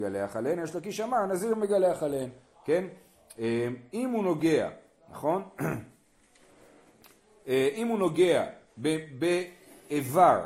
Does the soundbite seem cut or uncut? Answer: uncut